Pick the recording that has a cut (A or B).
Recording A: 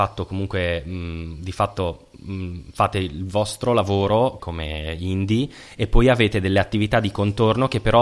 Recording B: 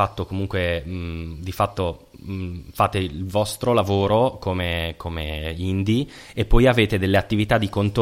A